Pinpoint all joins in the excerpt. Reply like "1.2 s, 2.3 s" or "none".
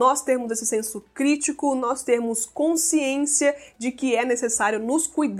none